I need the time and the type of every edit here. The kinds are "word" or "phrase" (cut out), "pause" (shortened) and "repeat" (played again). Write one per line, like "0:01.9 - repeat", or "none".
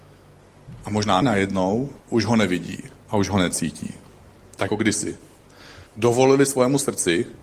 0:01.2 - word
0:02.0 - pause
0:03.0 - phrase
0:04.7 - word
0:05.9 - pause

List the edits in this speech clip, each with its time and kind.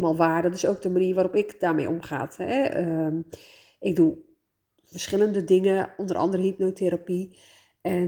none

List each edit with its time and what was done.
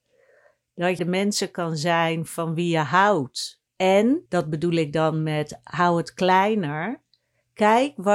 0:01.0 - phrase
0:04.3 - pause

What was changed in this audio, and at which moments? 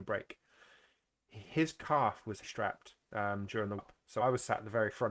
0:02.4 - word
0:03.8 - word
0:04.2 - word

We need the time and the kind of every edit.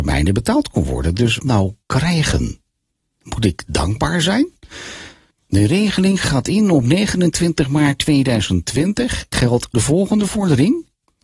0:01.4 - word
0:01.8 - pause
0:05.3 - pause
0:09.3 - word
0:09.7 - phrase

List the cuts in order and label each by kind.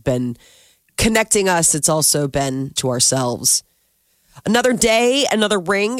0:02.8 - phrase

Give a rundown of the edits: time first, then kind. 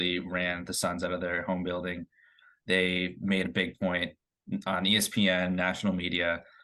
none

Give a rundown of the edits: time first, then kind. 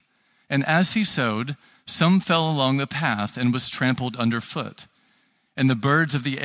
none

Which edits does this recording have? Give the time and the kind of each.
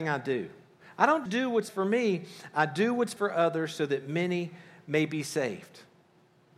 0:01.3 - word
0:01.7 - word
0:03.2 - word

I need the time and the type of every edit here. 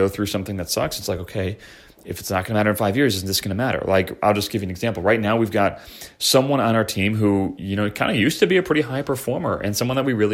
none

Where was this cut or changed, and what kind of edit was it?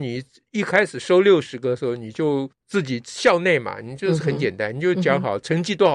0:02.5 - pause

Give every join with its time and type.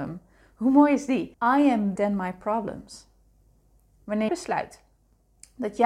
0:01.3 - pause
0:02.0 - word
0:04.3 - word

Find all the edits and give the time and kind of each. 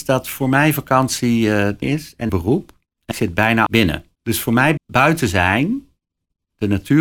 0:01.8 - phrase
0:02.3 - phrase
0:03.1 - word
0:03.7 - word
0:04.2 - pause
0:04.8 - phrase

